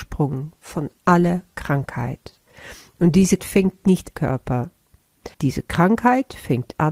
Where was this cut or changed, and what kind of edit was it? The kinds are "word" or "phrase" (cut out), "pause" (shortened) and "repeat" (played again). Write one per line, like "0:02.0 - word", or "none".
0:01.0 - pause
0:03.4 - word
0:04.1 - phrase
0:05.3 - pause